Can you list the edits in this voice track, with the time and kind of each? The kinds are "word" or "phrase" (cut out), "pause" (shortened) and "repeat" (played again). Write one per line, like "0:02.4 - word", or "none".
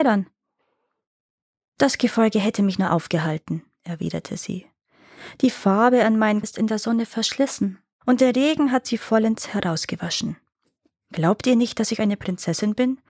0:06.4 - word